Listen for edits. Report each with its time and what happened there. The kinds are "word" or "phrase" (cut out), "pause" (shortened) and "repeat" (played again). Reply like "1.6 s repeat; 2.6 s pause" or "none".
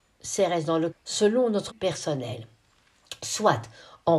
0.9 s word; 1.7 s word